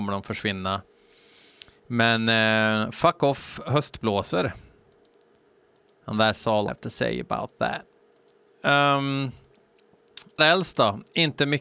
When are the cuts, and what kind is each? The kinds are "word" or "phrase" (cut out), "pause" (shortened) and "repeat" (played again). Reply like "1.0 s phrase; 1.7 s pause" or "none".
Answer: 6.7 s word; 10.4 s word